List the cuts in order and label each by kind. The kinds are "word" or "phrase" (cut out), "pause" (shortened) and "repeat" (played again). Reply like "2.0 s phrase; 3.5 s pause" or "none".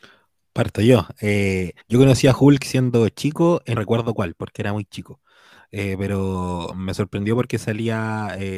1.8 s pause; 3.8 s phrase